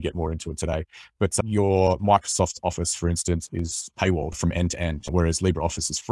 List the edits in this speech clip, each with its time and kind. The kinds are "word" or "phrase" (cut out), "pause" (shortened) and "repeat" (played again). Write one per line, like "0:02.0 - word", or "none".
none